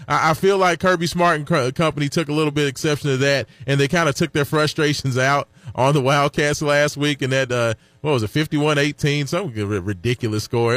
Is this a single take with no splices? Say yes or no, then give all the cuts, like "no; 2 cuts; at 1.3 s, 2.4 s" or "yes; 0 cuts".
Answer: yes; 0 cuts